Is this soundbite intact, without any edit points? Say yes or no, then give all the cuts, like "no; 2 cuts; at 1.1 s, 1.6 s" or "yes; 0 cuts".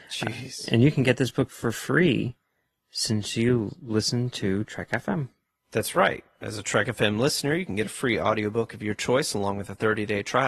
yes; 0 cuts